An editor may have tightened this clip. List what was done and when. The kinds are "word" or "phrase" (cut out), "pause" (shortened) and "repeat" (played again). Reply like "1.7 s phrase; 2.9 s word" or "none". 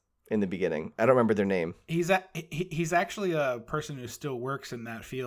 none